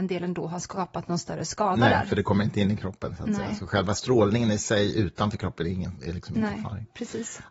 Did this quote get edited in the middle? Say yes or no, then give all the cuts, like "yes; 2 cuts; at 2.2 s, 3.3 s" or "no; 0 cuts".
no; 0 cuts